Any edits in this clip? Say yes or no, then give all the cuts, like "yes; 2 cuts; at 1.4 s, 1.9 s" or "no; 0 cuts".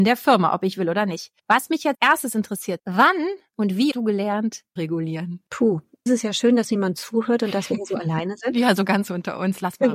yes; 8 cuts; at 1.4 s, 1.9 s, 2.8 s, 3.9 s, 4.8 s, 5.5 s, 6.1 s, 6.6 s